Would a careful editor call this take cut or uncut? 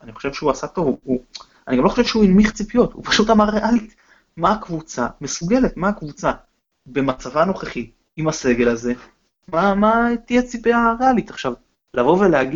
uncut